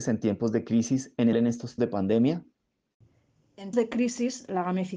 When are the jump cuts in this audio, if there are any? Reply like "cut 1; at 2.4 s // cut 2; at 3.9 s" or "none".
cut 1; at 1.3 s // cut 2; at 1.8 s // cut 3; at 3.7 s